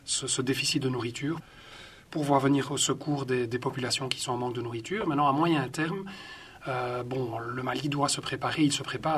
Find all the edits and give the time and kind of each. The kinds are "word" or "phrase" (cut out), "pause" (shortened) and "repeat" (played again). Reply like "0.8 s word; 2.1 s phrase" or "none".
none